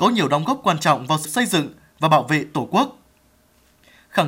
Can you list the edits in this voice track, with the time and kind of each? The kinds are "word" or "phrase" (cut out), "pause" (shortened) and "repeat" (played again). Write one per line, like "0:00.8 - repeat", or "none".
0:01.2 - word